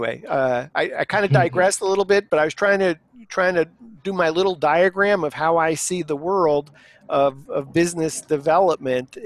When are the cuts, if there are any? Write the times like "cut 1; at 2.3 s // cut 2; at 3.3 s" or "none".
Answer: none